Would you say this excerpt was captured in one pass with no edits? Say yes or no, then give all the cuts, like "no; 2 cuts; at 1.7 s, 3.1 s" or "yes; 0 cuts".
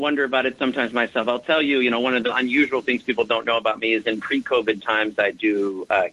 yes; 0 cuts